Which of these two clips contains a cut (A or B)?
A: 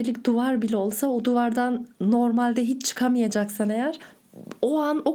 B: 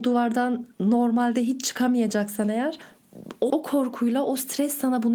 B